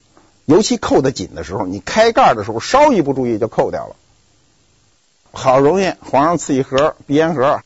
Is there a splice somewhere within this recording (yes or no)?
no